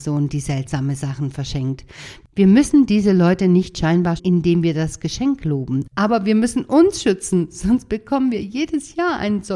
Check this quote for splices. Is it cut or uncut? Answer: cut